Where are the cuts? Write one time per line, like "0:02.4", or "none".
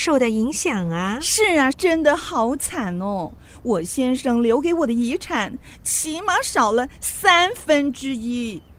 0:01.7